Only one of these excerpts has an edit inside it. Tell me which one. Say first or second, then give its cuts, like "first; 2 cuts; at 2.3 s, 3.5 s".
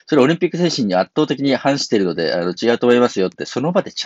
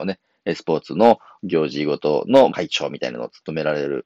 second; 1 cut; at 2.5 s